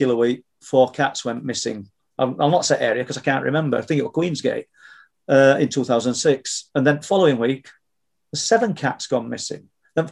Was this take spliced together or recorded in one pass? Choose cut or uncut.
uncut